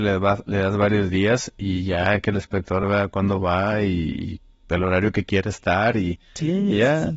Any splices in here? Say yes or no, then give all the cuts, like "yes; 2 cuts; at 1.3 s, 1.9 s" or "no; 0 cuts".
no; 0 cuts